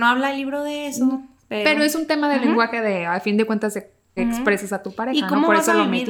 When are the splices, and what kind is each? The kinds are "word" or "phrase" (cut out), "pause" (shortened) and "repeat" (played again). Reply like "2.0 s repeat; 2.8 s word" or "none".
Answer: 4.2 s phrase